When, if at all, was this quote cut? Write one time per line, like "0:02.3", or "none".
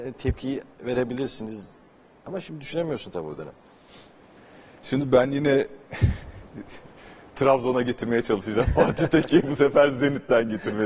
none